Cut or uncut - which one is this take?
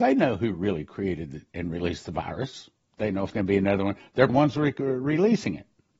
cut